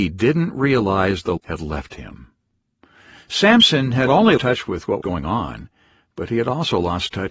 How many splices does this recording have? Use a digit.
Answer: 4